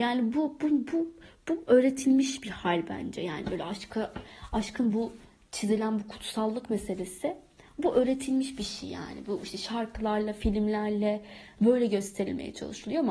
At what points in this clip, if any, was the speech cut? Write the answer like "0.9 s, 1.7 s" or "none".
none